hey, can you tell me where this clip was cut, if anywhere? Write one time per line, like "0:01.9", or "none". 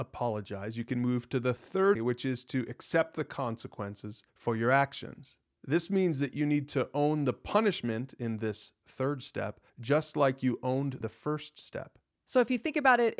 0:01.9
0:04.3
0:09.7
0:11.0